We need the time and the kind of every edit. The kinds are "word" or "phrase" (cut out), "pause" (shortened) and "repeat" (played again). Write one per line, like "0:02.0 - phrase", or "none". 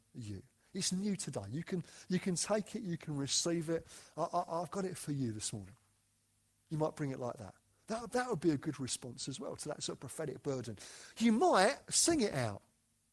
none